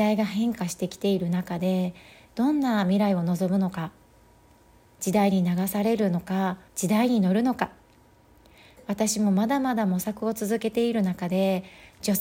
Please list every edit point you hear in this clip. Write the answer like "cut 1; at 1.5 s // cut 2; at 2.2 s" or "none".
cut 1; at 6.7 s